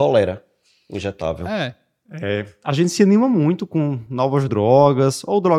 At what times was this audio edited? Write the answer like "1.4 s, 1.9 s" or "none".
none